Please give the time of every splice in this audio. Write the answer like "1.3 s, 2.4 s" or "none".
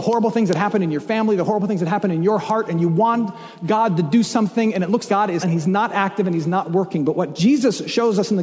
5.1 s, 5.4 s